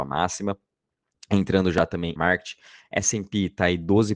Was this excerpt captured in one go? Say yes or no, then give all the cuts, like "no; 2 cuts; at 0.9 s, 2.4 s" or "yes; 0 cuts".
no; 1 cut; at 2.2 s